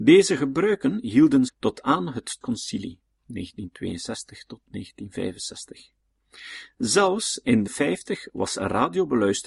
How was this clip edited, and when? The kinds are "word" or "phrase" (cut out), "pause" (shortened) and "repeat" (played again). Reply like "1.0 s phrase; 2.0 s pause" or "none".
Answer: 1.5 s word; 2.4 s phrase; 7.7 s word